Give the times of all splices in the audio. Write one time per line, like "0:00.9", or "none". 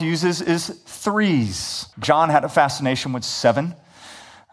0:01.9